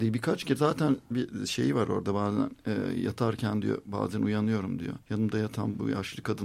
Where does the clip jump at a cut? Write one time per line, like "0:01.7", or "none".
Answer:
0:01.1
0:05.0